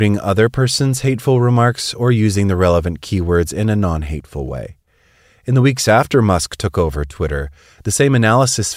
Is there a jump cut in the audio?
no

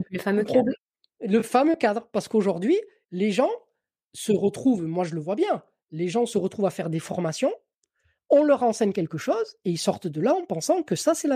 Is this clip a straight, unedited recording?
yes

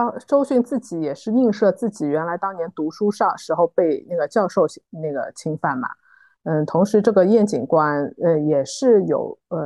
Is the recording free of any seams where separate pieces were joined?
yes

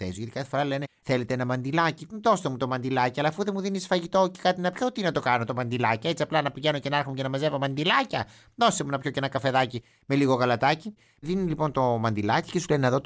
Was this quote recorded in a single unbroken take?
yes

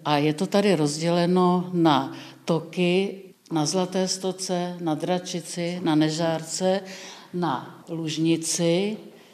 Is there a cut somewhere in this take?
yes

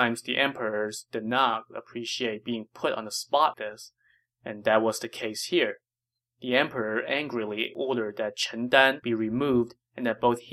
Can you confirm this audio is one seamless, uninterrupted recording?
no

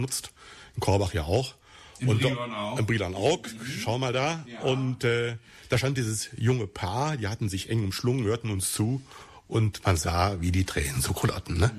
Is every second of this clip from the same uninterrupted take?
yes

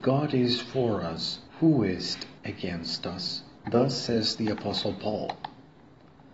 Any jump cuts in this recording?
yes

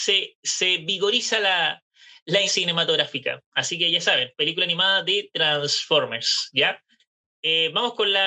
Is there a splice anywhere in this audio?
yes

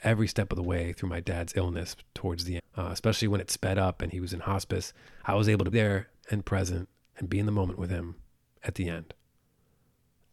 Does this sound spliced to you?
yes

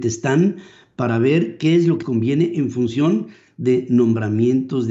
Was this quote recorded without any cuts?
no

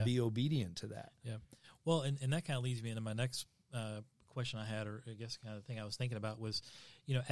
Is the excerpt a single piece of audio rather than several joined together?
yes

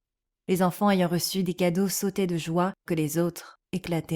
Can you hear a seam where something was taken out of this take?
yes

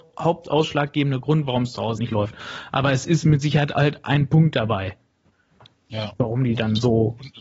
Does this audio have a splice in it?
yes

